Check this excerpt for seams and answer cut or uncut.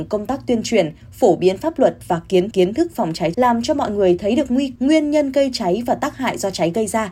cut